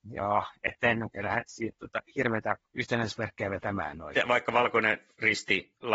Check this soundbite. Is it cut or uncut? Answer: cut